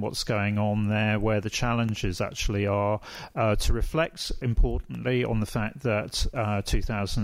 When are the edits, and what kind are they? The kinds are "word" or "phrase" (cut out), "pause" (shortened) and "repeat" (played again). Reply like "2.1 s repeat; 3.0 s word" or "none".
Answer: 4.4 s word